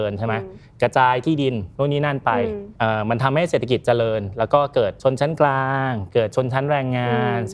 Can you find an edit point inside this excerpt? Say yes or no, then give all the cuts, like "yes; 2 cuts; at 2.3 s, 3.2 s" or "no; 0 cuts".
yes; 1 cut; at 1.8 s